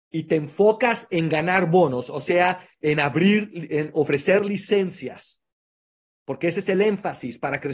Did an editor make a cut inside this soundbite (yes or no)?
no